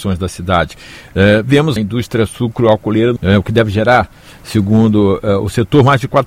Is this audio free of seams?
no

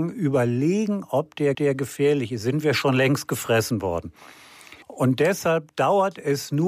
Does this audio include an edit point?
yes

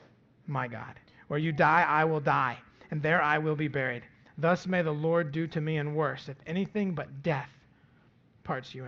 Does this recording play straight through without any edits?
no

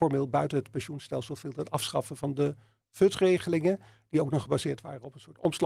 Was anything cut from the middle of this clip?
no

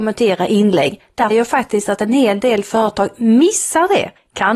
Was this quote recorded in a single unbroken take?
no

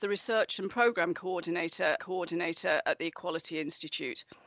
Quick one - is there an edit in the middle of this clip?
yes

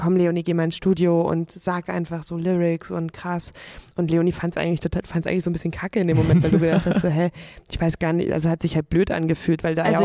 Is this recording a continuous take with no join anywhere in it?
yes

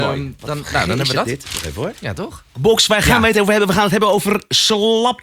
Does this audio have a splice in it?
yes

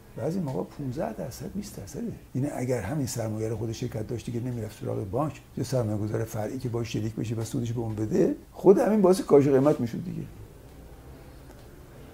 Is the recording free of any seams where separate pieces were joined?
no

